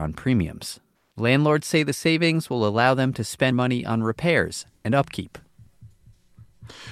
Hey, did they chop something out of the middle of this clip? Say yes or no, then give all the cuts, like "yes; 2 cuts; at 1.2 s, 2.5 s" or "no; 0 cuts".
yes; 1 cut; at 3.5 s